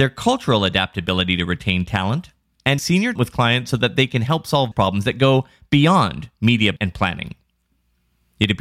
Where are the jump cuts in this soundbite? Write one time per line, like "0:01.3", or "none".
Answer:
0:02.8
0:03.1
0:04.7
0:06.8